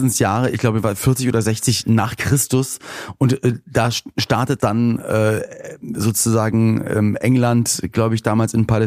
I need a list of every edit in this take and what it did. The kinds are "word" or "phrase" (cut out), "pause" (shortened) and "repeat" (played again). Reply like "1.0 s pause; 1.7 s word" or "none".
4.6 s phrase